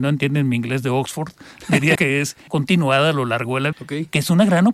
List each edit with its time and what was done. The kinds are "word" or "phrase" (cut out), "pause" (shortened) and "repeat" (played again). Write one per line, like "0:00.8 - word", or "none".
0:01.9 - word
0:02.5 - word
0:03.7 - word